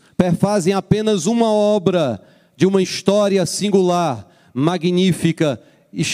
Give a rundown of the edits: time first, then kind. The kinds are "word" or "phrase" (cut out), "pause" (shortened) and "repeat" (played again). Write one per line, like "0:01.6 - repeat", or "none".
none